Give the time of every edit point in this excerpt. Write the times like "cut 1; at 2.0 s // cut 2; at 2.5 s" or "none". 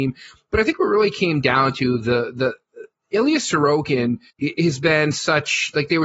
cut 1; at 4.3 s